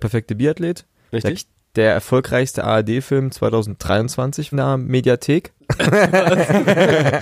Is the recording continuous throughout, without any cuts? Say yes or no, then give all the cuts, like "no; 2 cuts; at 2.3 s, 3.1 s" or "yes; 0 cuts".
no; 3 cuts; at 1.3 s, 4.5 s, 5.6 s